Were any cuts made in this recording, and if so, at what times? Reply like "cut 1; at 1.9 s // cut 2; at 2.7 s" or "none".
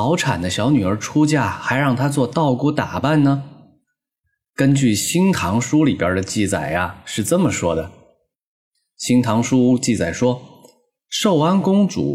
none